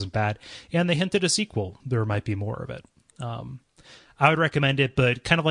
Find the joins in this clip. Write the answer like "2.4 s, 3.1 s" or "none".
1.8 s

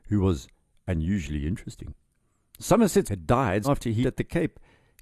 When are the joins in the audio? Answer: 3.1 s, 3.6 s, 4.0 s

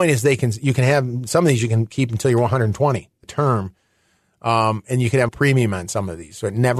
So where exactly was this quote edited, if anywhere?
3.2 s, 5.3 s

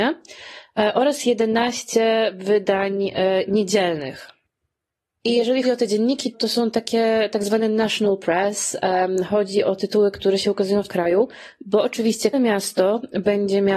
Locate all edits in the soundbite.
5.6 s, 6.3 s, 10.9 s, 12.3 s

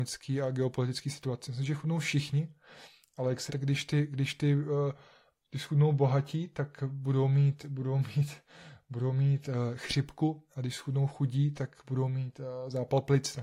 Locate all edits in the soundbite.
3.5 s

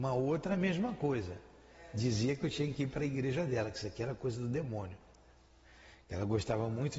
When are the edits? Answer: none

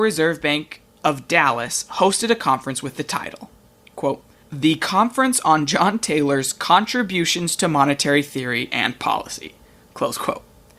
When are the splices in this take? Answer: 4.4 s

